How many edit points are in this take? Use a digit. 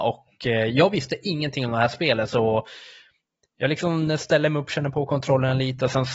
0